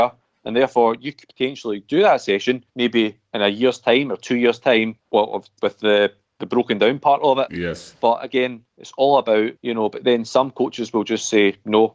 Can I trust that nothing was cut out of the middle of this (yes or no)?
no